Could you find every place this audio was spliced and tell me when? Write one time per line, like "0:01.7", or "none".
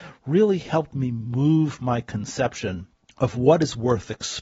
0:03.0